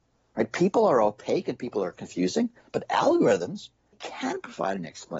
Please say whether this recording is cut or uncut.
cut